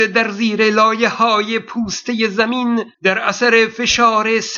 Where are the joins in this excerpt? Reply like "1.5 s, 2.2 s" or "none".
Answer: 2.9 s